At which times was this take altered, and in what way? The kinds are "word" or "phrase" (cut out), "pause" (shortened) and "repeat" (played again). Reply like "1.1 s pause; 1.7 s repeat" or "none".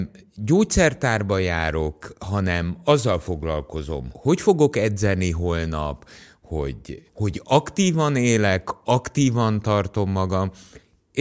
4.1 s word; 7.1 s word